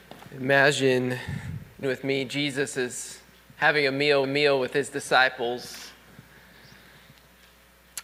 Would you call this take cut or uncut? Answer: cut